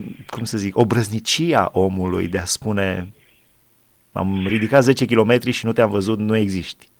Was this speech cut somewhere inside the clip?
no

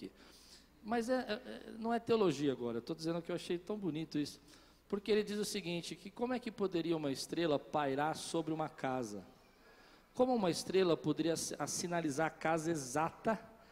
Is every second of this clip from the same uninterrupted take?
yes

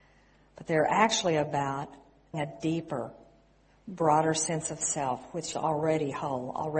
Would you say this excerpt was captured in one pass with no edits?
no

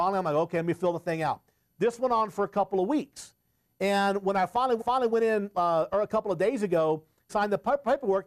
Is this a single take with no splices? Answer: no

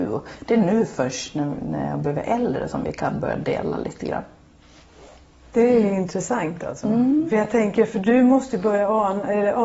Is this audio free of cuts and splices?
yes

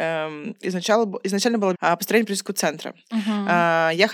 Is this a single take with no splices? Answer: no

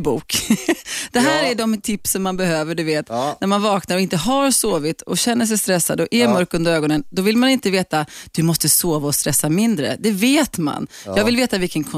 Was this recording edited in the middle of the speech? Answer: no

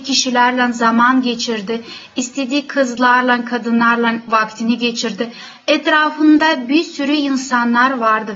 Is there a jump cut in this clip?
no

